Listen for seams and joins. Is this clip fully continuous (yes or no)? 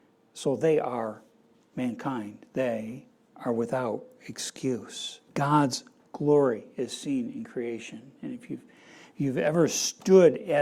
no